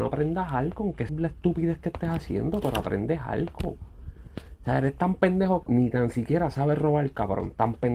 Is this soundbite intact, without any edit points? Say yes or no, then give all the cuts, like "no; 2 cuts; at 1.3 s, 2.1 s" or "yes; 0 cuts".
no; 2 cuts; at 1.1 s, 5.6 s